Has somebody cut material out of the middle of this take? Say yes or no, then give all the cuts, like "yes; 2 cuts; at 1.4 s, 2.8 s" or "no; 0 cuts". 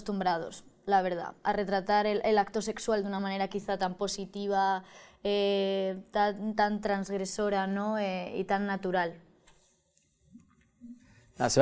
no; 0 cuts